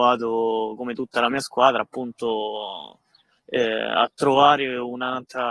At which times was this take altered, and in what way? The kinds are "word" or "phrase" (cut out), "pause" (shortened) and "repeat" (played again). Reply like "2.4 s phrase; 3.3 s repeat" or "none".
none